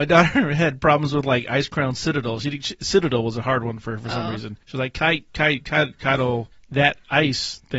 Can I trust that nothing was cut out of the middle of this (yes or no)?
no